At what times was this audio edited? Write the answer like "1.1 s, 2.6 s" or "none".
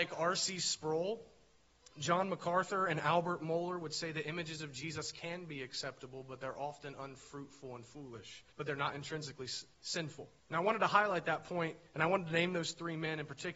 8.5 s, 10.4 s